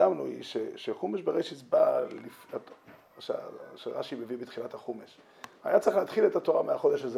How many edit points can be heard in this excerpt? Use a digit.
1